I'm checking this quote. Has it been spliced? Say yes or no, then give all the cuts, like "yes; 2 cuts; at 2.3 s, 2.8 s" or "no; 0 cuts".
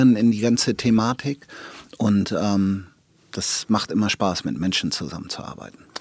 no; 0 cuts